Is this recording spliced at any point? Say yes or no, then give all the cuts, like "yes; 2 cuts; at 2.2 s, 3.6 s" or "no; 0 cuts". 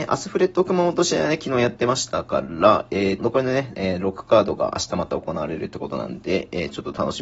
yes; 1 cut; at 3.2 s